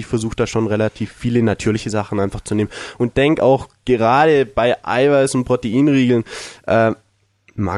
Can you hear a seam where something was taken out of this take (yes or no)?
no